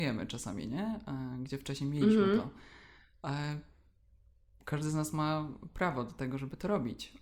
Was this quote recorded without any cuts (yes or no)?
yes